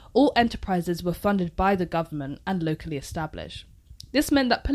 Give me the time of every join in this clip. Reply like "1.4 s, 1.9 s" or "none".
none